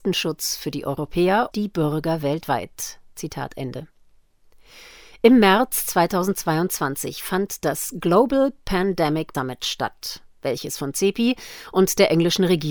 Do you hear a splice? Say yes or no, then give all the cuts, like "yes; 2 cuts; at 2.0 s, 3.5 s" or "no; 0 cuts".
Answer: yes; 2 cuts; at 1.5 s, 9.3 s